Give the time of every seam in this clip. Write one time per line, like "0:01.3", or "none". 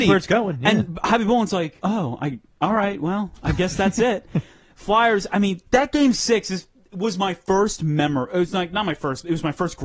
none